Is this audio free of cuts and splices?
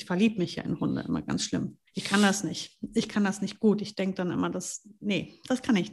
no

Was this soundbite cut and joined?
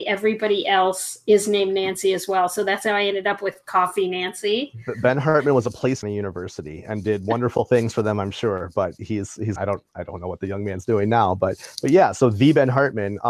yes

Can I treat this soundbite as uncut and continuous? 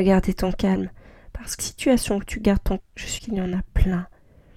no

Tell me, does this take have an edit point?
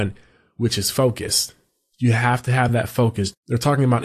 no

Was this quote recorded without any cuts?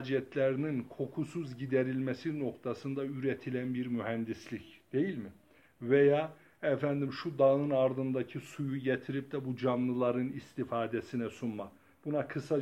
yes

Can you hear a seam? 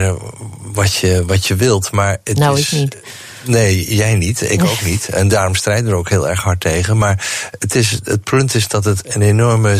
no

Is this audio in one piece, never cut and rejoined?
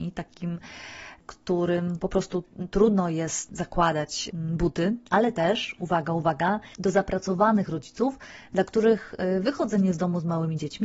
no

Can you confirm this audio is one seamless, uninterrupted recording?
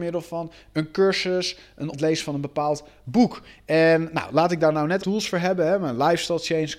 no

